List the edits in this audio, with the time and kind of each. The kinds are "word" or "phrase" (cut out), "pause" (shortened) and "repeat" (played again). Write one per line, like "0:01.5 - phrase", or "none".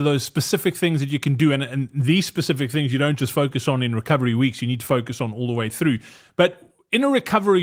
none